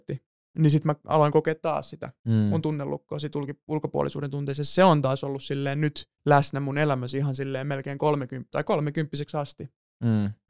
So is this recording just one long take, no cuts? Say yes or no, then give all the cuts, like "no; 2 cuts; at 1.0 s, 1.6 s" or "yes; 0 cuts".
no; 1 cut; at 6.2 s